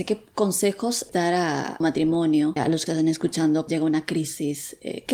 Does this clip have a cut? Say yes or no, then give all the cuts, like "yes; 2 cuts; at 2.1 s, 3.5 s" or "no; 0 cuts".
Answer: yes; 5 cuts; at 1.1 s, 1.8 s, 2.6 s, 2.9 s, 3.7 s